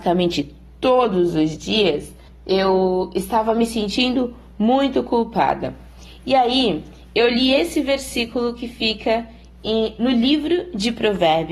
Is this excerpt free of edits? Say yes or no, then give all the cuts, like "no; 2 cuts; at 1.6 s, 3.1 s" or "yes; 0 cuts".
no; 1 cut; at 2.3 s